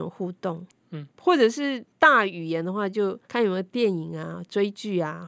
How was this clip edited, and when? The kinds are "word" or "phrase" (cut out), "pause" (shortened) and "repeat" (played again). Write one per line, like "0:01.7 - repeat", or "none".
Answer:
0:03.2 - pause